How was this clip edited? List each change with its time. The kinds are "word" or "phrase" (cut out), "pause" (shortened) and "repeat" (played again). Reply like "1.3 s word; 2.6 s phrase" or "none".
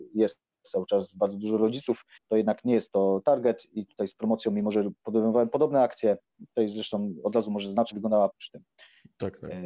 2.2 s pause; 7.9 s word; 8.3 s word